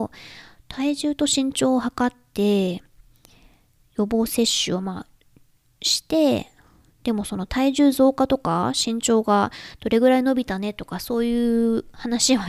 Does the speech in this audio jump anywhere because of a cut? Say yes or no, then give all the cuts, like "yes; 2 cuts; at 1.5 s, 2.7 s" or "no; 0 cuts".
no; 0 cuts